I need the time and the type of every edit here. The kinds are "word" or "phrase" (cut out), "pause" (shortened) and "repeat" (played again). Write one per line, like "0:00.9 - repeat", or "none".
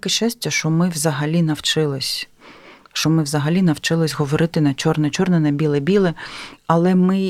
none